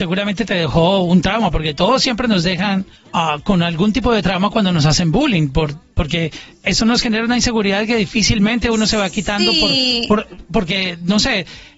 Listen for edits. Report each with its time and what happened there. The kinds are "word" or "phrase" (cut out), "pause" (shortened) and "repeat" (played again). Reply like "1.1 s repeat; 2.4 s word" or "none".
3.0 s pause